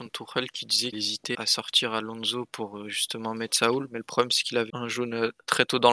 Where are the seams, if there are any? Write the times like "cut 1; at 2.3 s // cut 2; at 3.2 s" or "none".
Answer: cut 1; at 0.9 s // cut 2; at 1.3 s // cut 3; at 4.7 s